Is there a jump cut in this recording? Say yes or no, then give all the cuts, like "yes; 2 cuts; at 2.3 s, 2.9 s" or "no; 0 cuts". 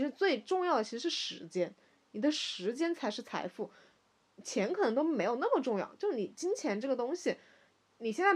no; 0 cuts